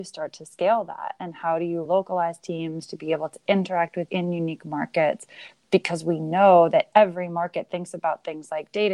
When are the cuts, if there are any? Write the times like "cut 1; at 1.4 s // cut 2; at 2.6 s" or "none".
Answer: cut 1; at 1.9 s // cut 2; at 4.1 s